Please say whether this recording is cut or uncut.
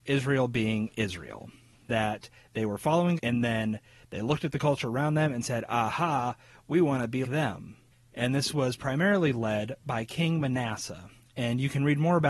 cut